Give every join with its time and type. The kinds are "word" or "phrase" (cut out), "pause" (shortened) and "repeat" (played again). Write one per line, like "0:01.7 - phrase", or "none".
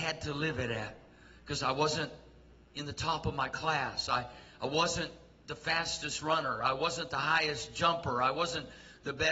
none